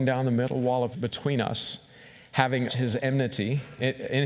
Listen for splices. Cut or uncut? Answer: cut